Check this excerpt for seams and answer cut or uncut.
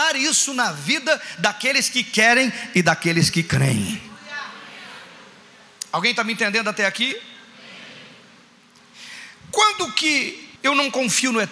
cut